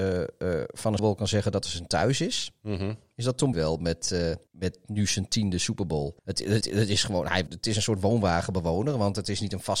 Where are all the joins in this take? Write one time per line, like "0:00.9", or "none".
0:01.0
0:03.5
0:04.5
0:06.2
0:06.6
0:07.5